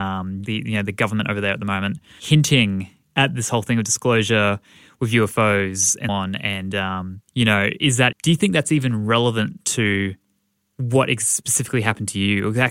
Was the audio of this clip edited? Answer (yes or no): yes